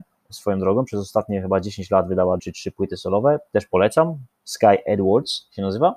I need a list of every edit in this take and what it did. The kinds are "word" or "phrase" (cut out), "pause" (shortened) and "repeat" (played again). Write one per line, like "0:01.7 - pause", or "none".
0:02.4 - word